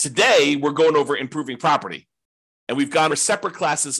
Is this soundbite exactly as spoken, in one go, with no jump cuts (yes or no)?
no